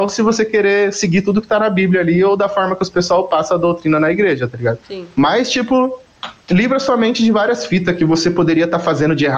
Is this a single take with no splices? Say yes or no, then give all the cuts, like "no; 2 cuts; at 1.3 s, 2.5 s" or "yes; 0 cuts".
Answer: no; 2 cuts; at 4.8 s, 6.4 s